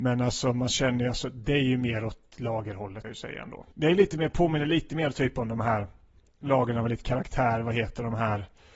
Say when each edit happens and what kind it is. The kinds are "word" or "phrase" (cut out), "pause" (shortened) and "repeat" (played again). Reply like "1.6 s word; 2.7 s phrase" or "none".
3.0 s word; 3.7 s pause